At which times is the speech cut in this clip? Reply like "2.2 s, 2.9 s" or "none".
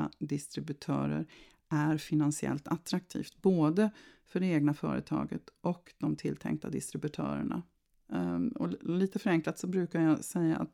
none